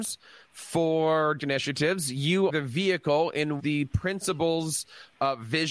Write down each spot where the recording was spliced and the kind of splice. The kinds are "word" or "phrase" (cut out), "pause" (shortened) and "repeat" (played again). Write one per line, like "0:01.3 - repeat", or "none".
0:01.4 - word
0:02.5 - word
0:03.6 - word